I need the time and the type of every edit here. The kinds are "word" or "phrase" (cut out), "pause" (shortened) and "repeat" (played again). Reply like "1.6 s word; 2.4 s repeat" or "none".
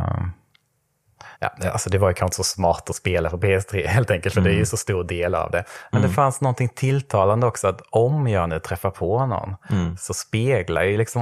1.3 s pause